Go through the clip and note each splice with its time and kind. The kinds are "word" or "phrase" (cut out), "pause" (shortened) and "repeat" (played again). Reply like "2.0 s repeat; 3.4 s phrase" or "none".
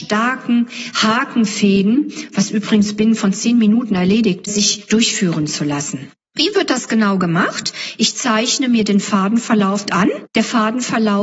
4.4 s word; 9.9 s phrase